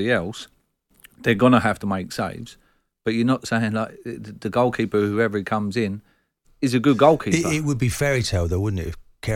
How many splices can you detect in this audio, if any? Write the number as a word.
zero